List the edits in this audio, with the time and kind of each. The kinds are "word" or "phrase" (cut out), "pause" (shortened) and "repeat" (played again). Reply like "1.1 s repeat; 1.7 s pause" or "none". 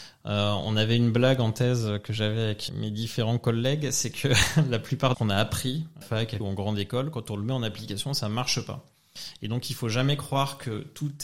2.7 s word; 5.1 s phrase; 6.0 s phrase; 6.4 s word